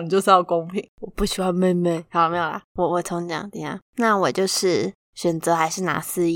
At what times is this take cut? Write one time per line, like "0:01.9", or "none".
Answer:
0:00.9
0:03.9